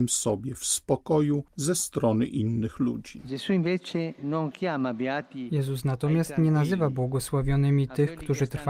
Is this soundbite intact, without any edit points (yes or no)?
yes